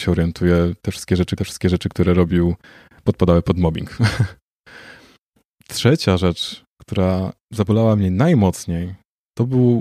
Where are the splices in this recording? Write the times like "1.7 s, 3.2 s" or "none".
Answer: 1.4 s, 5.5 s, 7.4 s